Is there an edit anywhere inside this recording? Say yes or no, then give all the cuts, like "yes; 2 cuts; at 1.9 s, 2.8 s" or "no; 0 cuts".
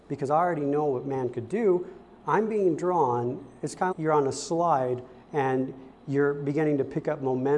yes; 1 cut; at 3.9 s